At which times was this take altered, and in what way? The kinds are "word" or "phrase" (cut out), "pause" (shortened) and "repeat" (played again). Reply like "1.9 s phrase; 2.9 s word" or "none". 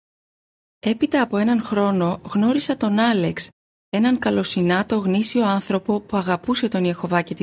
none